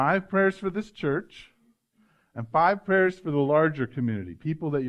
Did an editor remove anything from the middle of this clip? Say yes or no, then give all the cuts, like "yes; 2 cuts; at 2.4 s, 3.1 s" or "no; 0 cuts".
no; 0 cuts